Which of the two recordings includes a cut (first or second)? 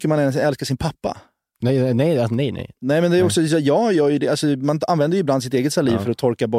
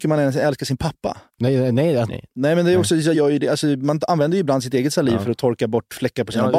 second